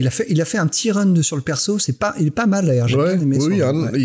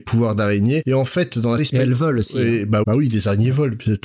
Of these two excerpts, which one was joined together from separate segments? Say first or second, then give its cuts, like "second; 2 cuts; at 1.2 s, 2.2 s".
second; 2 cuts; at 1.6 s, 2.8 s